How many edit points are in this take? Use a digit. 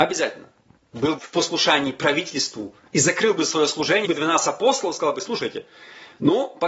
2